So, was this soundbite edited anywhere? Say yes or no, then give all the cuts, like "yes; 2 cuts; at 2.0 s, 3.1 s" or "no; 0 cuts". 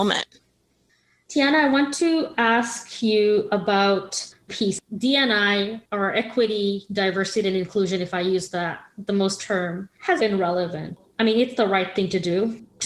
yes; 3 cuts; at 4.5 s, 9.4 s, 10.2 s